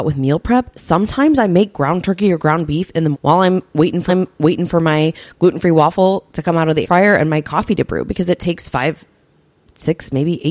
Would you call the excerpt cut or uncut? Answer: cut